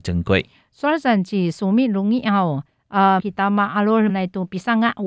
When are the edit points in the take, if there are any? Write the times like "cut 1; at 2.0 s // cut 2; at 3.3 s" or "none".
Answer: cut 1; at 3.2 s // cut 2; at 4.1 s

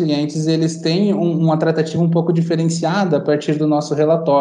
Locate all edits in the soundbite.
none

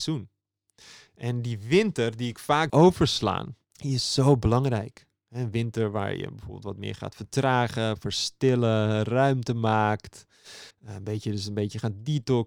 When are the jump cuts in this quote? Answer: cut 1; at 2.7 s // cut 2; at 3.6 s // cut 3; at 10.7 s

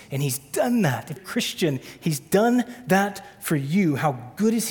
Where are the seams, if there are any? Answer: cut 1; at 1.2 s

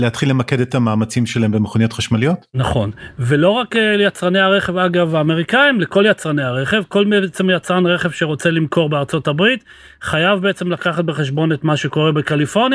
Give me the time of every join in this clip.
none

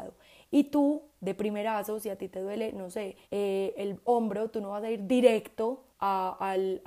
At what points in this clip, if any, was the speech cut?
cut 1; at 3.2 s // cut 2; at 5.9 s

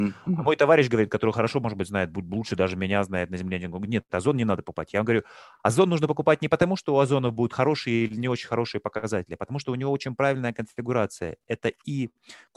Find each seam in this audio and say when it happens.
none

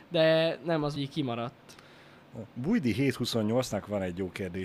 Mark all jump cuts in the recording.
cut 1; at 1.0 s // cut 2; at 2.5 s

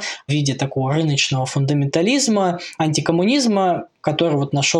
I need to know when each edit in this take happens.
cut 1; at 2.8 s

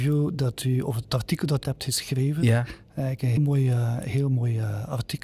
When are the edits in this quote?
cut 1; at 1.6 s // cut 2; at 3.4 s

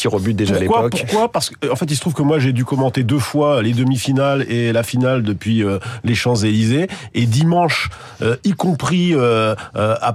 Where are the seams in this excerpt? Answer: none

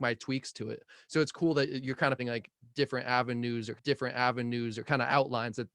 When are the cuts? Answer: cut 1; at 2.2 s // cut 2; at 3.8 s

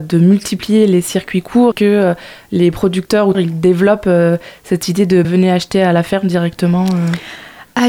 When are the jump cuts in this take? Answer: cut 1; at 1.7 s // cut 2; at 3.3 s // cut 3; at 5.2 s

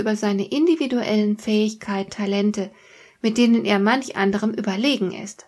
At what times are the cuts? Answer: cut 1; at 2.1 s

